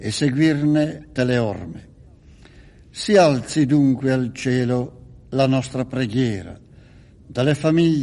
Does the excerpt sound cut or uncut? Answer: cut